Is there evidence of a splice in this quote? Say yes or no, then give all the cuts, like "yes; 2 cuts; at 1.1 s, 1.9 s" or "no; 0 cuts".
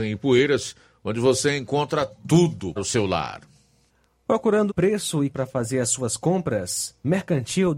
yes; 4 cuts; at 2.8 s, 3.9 s, 4.7 s, 5.3 s